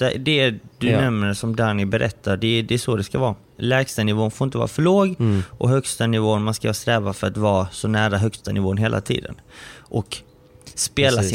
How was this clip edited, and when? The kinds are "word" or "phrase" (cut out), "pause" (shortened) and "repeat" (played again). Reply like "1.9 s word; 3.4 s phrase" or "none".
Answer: none